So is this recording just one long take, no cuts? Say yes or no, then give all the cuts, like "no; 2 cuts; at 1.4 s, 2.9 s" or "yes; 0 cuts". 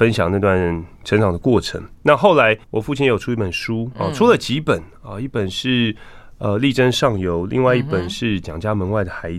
no; 3 cuts; at 0.9 s, 2.6 s, 3.9 s